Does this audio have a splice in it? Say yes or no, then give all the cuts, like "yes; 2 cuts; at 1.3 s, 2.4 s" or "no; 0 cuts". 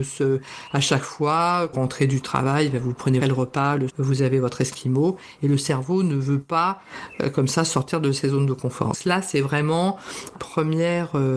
yes; 5 cuts; at 1.7 s, 3.2 s, 3.9 s, 8.9 s, 10.4 s